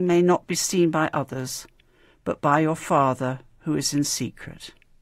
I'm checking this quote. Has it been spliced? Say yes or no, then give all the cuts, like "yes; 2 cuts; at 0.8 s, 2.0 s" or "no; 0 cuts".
no; 0 cuts